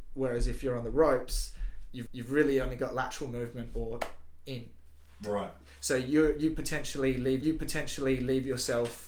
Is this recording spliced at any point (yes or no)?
yes